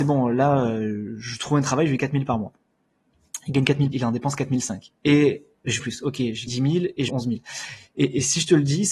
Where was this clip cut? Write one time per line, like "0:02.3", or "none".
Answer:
0:02.0
0:03.9
0:05.0
0:05.8
0:06.5
0:07.1